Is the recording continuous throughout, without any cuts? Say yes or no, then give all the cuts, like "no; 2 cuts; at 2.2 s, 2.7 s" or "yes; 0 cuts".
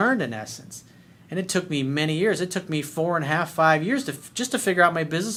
yes; 0 cuts